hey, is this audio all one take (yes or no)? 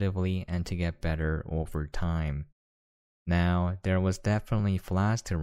yes